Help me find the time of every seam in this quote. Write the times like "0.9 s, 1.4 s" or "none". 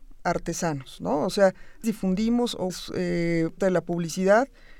1.8 s, 2.7 s, 3.6 s